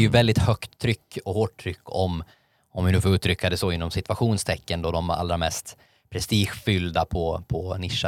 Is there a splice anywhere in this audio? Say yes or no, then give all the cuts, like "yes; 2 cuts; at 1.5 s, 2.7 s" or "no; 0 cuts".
no; 0 cuts